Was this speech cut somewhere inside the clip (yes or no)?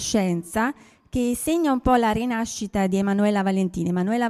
no